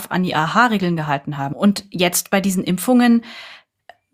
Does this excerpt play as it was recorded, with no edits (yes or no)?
yes